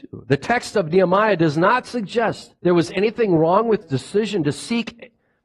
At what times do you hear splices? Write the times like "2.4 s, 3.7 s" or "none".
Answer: 2.6 s, 3.8 s